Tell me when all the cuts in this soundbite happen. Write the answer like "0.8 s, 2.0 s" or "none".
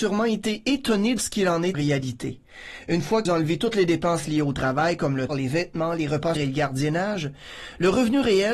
1.2 s, 1.7 s, 3.3 s, 5.3 s, 6.4 s